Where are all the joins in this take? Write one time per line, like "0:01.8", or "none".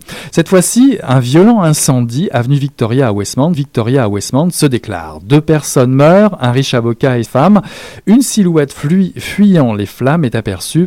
0:03.5
0:07.2